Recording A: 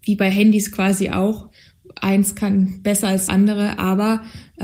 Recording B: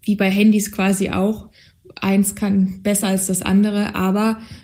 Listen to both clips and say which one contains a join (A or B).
A